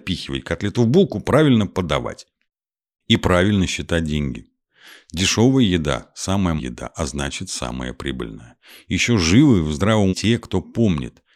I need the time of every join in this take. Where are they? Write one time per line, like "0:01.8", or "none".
0:06.6
0:10.1